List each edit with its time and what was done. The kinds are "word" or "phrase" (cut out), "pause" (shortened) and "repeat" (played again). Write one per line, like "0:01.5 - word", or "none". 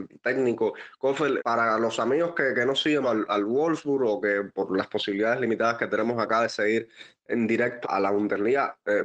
0:01.4 - word
0:03.0 - word
0:07.8 - word